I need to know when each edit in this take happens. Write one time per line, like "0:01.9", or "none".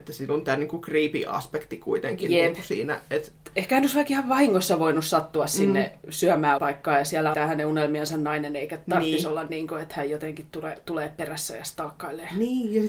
0:06.6
0:07.3